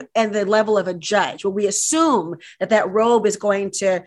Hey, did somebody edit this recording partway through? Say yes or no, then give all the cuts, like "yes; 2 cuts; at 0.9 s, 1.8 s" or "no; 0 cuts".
no; 0 cuts